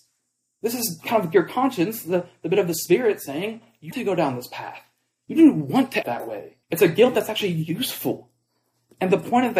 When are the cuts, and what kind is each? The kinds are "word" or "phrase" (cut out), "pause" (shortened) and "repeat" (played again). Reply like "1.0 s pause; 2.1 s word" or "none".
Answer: 3.9 s phrase; 6.0 s word; 6.6 s pause